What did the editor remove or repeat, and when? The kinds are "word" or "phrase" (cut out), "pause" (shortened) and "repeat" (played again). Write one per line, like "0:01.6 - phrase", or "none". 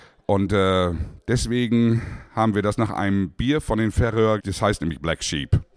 0:04.4 - word